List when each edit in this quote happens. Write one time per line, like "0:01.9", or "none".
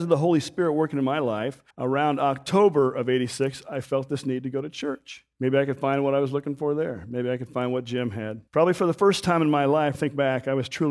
0:01.7
0:05.3
0:08.5
0:09.9